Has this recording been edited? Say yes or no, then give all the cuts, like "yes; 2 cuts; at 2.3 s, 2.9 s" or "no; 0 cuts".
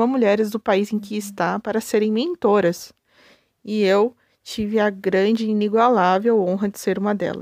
no; 0 cuts